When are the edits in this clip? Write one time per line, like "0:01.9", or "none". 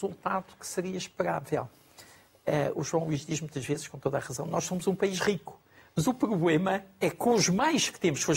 none